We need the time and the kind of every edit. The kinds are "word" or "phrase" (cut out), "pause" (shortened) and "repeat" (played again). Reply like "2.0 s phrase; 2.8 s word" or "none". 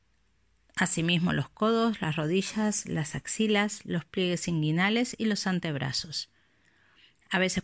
none